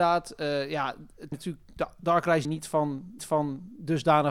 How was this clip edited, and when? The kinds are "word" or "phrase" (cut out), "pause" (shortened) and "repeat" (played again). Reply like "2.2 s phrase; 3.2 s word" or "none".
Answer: 1.3 s word; 2.4 s phrase; 3.2 s repeat

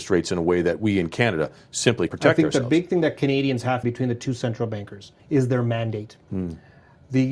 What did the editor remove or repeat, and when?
2.1 s word; 3.8 s phrase; 5.2 s pause

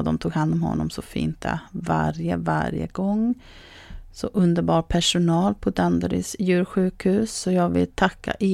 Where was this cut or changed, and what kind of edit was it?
none

